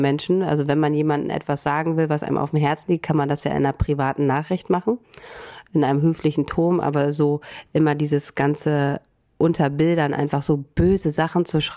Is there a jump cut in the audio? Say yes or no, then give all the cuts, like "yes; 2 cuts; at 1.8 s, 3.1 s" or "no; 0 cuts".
no; 0 cuts